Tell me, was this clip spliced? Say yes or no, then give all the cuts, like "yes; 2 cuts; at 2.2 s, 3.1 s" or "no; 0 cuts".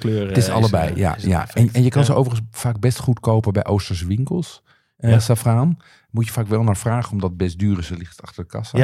no; 0 cuts